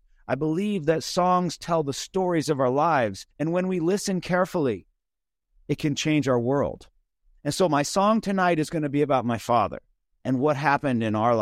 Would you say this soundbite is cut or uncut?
cut